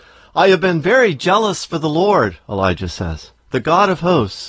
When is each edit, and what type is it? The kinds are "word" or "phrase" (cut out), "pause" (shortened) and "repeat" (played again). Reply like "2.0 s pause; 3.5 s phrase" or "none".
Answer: 3.4 s pause